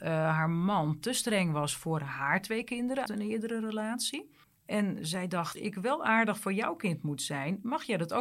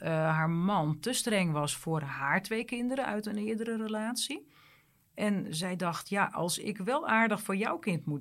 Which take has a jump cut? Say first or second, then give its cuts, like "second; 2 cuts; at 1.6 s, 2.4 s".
first; 3 cuts; at 3.1 s, 4.4 s, 5.6 s